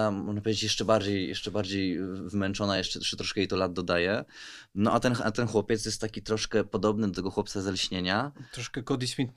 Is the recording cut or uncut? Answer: uncut